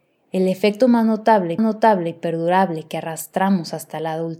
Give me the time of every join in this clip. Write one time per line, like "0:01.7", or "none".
0:01.6